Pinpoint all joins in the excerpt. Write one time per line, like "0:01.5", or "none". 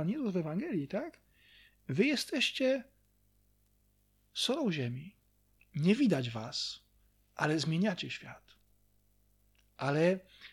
none